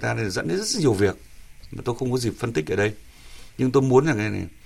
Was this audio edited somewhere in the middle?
no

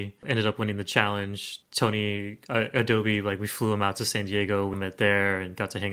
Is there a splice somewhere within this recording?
yes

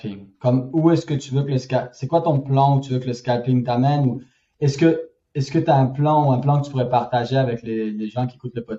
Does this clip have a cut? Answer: no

